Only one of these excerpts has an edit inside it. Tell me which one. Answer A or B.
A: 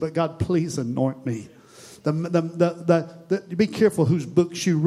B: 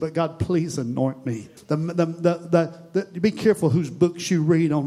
B